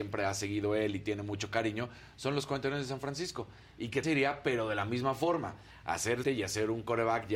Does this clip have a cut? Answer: yes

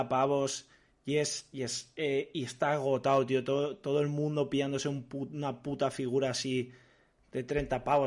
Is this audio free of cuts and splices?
yes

